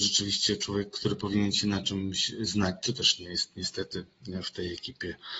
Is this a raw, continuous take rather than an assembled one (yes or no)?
yes